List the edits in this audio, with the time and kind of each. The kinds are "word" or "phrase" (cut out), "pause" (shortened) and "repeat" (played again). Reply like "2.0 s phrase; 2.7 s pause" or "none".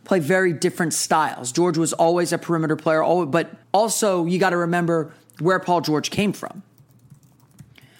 3.6 s pause